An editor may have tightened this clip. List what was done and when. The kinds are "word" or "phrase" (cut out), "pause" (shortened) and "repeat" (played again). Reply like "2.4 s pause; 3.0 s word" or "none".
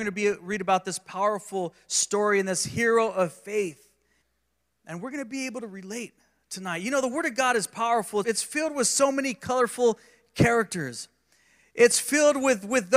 4.2 s pause; 8.2 s word

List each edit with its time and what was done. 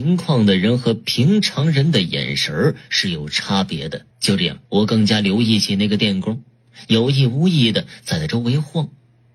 4.1 s pause; 4.7 s pause

